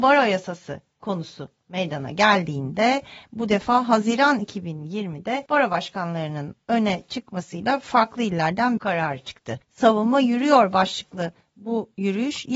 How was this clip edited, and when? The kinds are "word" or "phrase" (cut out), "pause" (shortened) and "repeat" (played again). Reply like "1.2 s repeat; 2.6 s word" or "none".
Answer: 1.0 s word; 5.5 s pause; 8.8 s phrase; 9.6 s pause